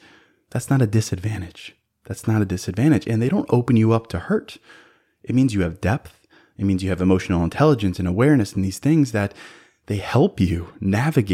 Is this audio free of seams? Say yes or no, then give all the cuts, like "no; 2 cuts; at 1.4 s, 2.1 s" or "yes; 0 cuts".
yes; 0 cuts